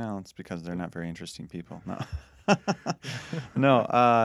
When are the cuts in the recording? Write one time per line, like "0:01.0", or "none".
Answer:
none